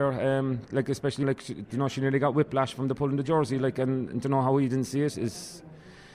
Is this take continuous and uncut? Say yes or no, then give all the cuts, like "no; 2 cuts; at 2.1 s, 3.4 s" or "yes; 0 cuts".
no; 1 cut; at 1.2 s